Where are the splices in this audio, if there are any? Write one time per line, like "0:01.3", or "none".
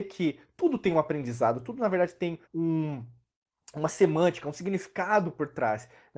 0:02.4